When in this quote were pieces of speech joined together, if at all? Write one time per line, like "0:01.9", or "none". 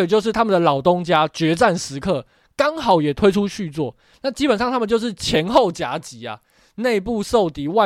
none